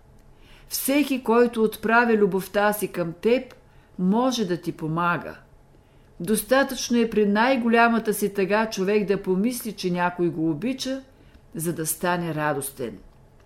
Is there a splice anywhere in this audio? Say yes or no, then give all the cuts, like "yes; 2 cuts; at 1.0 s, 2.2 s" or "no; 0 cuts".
no; 0 cuts